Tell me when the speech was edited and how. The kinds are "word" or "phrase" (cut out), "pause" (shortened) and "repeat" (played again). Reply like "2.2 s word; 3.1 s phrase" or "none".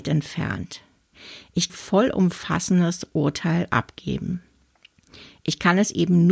1.7 s phrase